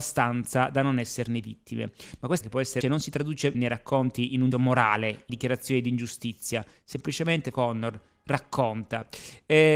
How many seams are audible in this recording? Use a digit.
6